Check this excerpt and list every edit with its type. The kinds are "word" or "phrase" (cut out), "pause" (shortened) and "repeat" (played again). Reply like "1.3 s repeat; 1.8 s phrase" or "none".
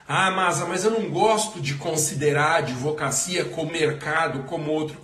3.7 s word